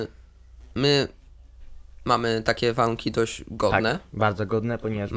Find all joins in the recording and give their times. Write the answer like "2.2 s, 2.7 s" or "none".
none